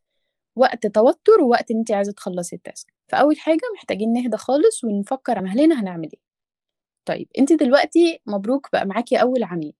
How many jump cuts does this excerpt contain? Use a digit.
2